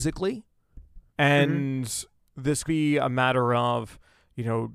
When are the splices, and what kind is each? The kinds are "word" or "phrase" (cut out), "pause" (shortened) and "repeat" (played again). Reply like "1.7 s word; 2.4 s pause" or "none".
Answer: 1.1 s pause; 2.7 s word